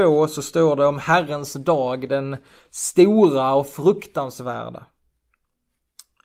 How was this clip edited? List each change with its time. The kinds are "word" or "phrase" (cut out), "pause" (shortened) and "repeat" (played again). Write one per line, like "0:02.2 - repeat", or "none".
none